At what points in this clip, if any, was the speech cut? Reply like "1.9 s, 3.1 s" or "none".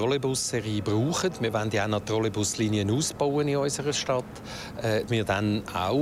5.1 s